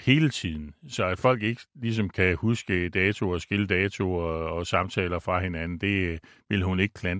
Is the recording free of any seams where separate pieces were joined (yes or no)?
yes